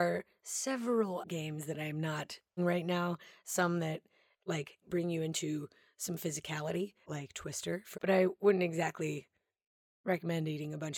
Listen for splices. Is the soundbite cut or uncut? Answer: cut